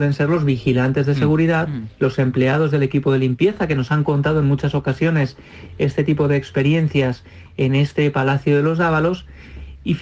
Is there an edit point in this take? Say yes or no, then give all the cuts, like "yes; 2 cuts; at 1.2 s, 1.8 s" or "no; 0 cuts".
no; 0 cuts